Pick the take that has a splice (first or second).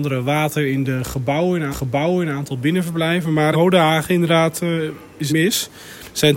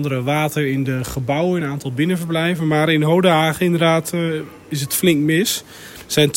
first